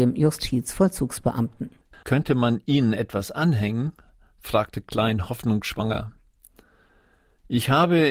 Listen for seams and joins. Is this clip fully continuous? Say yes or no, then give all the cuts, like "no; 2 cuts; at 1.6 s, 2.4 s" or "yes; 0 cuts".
yes; 0 cuts